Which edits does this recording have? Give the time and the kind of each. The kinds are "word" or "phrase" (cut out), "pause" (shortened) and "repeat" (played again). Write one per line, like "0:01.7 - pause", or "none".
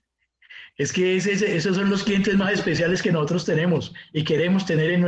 none